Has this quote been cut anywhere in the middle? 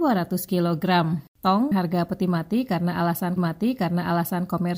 yes; 2 cuts; at 1.7 s, 3.4 s

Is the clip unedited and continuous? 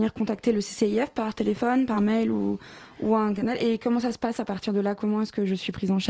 yes; 0 cuts

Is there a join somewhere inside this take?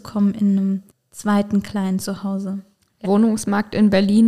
yes; 2 cuts; at 0.9 s, 3.0 s

